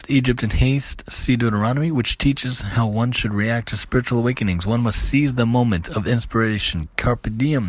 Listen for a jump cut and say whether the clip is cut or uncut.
uncut